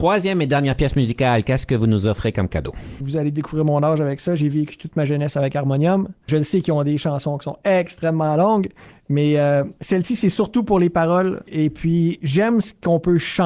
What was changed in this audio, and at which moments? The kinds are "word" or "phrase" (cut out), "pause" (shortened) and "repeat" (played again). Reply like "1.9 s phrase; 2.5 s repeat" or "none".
9.8 s pause